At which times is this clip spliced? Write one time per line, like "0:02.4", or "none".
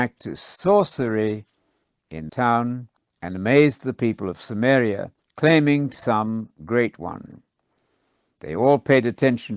0:02.3
0:03.0
0:05.2
0:05.9